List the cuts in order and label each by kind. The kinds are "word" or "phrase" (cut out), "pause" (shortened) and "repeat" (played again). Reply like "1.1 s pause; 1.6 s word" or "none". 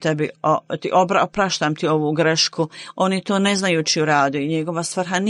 none